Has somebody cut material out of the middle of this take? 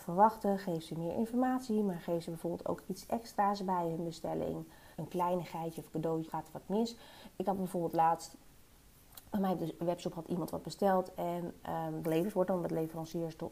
yes; 3 cuts; at 4.9 s, 6.3 s, 12.0 s

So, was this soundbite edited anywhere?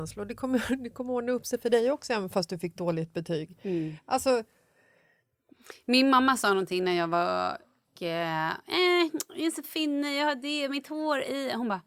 yes; 2 cuts; at 7.8 s, 9.6 s

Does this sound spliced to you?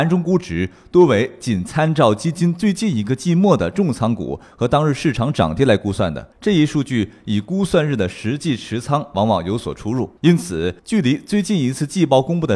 yes; 3 cuts; at 6.3 s, 10.2 s, 10.8 s

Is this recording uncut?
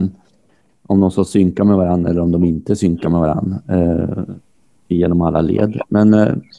yes; 0 cuts

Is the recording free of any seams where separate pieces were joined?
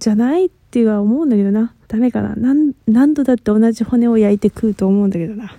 no; 1 cut; at 1.8 s

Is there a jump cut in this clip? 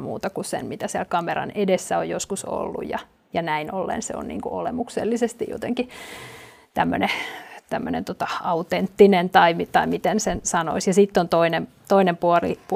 no; 0 cuts

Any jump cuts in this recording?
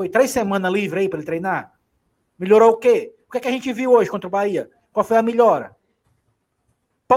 no; 0 cuts

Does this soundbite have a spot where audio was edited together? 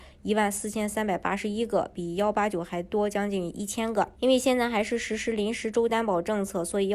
yes; 1 cut; at 4.1 s

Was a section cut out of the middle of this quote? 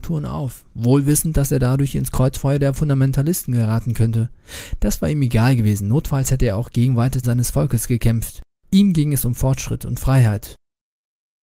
yes; 2 cuts; at 7.2 s, 8.5 s

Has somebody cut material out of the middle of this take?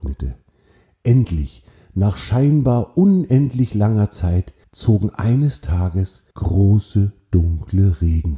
yes; 2 cuts; at 4.6 s, 6.3 s

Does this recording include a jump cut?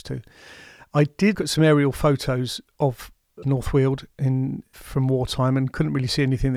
yes; 3 cuts; at 1.3 s, 3.4 s, 4.7 s

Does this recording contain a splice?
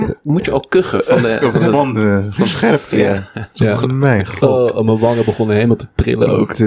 no; 0 cuts

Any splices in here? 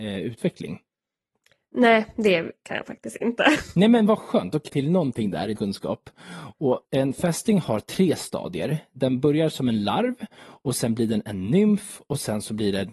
yes; 3 cuts; at 4.7 s, 5.6 s, 6.8 s

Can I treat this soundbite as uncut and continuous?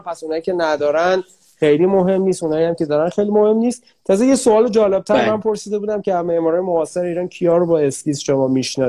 yes; 0 cuts

